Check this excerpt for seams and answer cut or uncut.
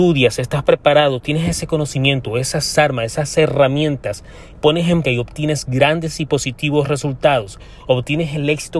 cut